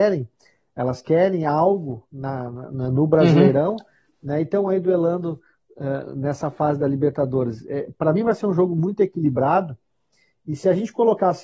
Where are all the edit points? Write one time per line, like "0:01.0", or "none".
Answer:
none

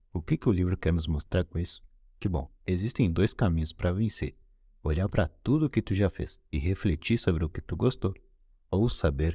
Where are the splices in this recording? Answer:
none

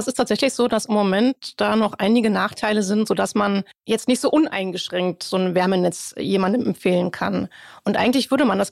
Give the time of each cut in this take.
none

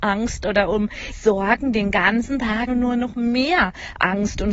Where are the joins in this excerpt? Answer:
0:01.1
0:02.7

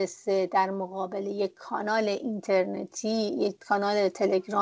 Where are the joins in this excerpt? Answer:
none

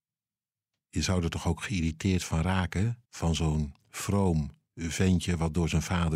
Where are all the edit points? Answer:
0:03.1
0:03.8

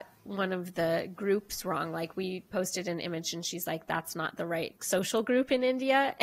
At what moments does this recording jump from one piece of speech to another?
0:04.8

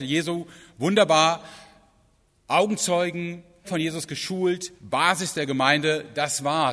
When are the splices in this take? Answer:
0:03.6
0:04.8

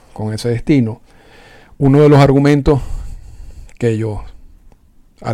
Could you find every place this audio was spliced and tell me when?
none

